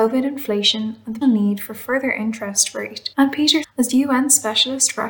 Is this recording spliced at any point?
yes; 3 cuts; at 1.2 s, 3.1 s, 3.6 s

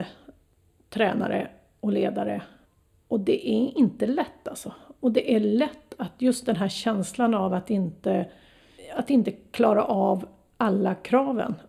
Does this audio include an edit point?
no; 0 cuts

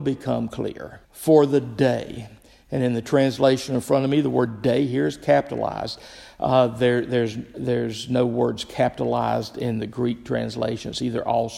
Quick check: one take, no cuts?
no; 1 cut; at 1.0 s

